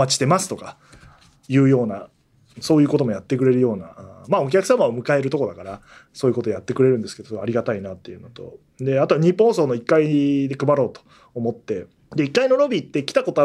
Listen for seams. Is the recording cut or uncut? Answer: uncut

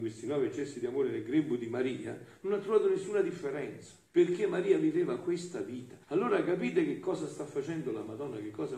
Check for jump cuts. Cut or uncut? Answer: cut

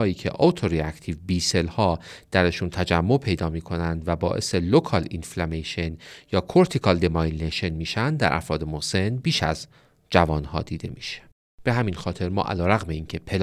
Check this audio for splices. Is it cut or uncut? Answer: uncut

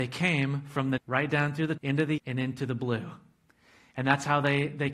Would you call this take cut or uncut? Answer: cut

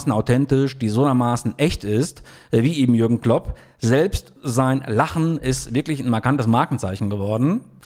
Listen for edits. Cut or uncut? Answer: uncut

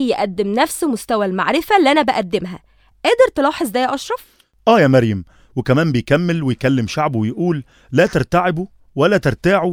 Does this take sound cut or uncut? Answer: uncut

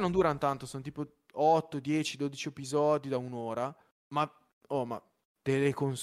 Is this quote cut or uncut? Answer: uncut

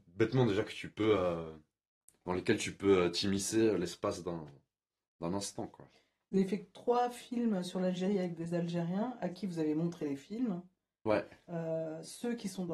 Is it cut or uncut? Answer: uncut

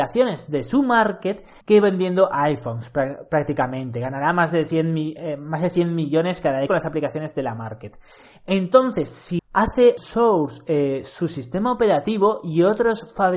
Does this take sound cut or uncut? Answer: cut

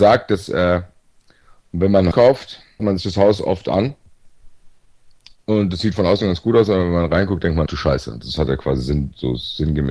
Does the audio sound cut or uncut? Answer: cut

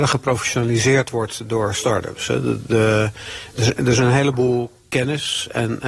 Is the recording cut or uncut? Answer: uncut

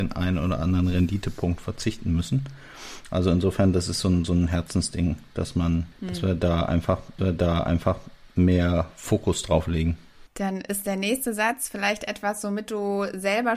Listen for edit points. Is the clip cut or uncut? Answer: cut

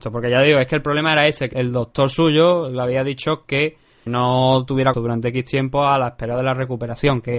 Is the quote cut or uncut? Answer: cut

